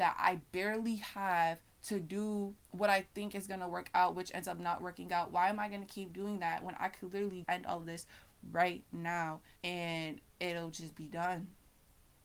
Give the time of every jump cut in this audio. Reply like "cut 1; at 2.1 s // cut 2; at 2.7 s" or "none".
cut 1; at 2.6 s // cut 2; at 7.4 s // cut 3; at 9.6 s